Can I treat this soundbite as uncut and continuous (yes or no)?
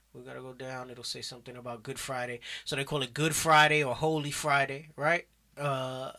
yes